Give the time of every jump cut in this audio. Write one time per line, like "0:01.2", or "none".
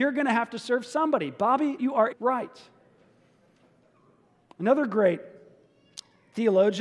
0:01.8
0:02.1